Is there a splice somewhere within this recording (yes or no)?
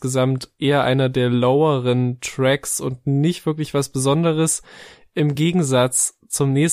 no